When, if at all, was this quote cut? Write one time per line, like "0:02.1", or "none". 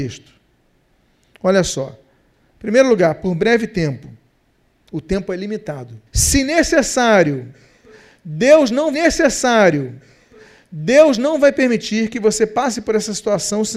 0:06.1
0:08.9